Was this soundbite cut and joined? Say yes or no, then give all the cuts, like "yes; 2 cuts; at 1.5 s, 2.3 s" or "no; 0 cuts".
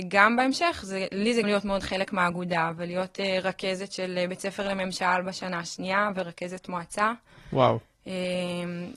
yes; 1 cut; at 1.4 s